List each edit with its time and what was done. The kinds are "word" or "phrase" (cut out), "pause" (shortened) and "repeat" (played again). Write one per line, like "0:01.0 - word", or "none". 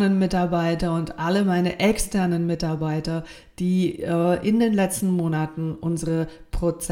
none